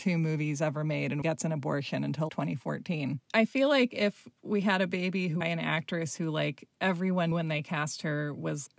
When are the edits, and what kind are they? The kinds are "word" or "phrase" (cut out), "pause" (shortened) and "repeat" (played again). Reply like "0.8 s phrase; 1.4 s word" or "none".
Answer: 1.2 s phrase; 2.3 s word; 5.4 s phrase; 7.3 s word